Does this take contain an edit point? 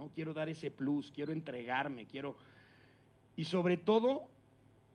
no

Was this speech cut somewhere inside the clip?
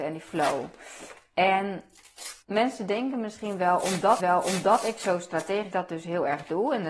yes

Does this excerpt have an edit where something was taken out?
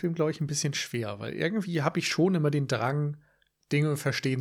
no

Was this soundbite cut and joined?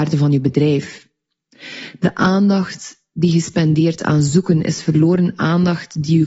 no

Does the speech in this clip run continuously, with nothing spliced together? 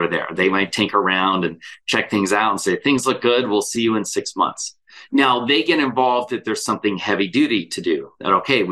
yes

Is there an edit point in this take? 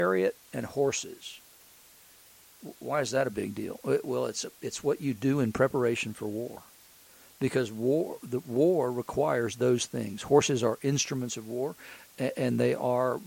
no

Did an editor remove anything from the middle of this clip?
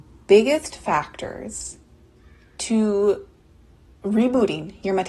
no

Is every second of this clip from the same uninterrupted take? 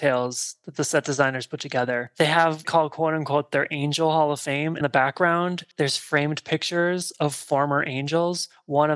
no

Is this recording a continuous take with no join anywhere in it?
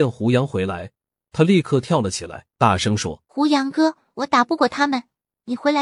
no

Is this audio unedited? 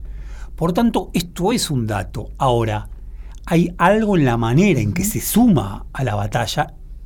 yes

